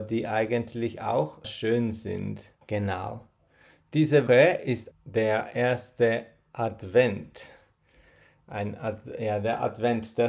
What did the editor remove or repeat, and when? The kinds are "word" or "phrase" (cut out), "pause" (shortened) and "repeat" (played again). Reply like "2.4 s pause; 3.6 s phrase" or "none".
1.4 s word; 2.6 s pause; 4.3 s word; 4.9 s word